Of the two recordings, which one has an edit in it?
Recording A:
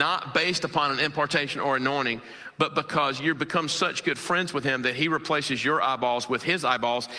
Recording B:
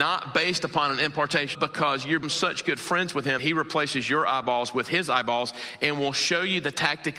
B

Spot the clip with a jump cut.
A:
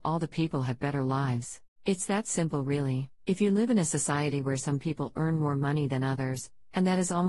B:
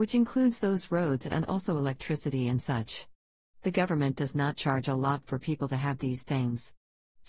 A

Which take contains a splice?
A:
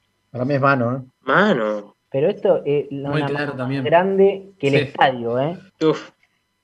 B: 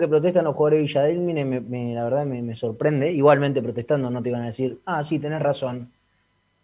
A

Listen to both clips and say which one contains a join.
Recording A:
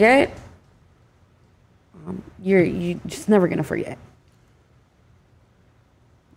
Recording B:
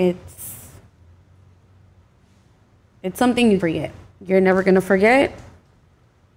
B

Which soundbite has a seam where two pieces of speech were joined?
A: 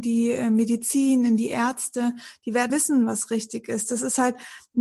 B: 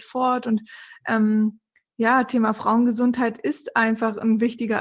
A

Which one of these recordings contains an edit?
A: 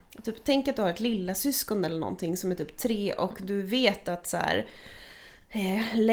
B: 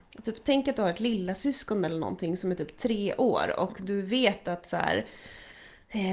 A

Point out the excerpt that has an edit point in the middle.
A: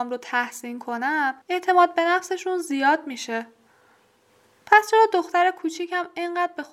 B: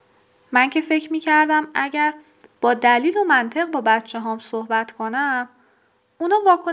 A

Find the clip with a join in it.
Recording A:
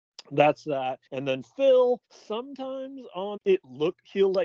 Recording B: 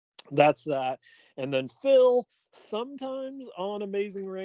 A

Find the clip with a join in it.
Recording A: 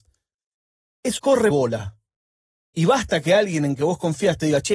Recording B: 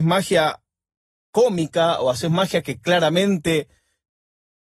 A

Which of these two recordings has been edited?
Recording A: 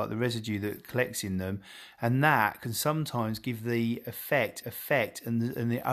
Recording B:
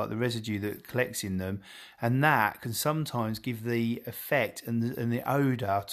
A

